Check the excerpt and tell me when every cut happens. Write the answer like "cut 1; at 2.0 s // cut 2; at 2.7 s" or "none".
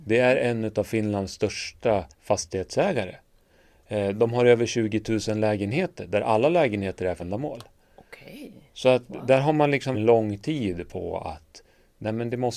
cut 1; at 2.1 s // cut 2; at 7.2 s // cut 3; at 9.9 s